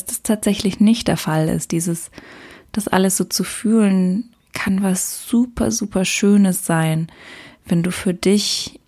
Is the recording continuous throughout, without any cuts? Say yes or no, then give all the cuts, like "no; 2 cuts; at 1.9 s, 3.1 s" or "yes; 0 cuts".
yes; 0 cuts